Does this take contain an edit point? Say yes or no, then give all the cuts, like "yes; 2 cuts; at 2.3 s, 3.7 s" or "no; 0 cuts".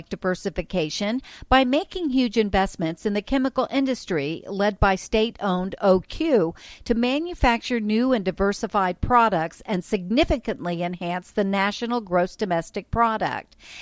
no; 0 cuts